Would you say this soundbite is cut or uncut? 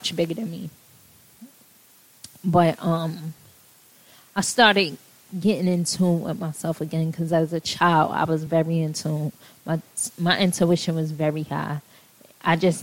uncut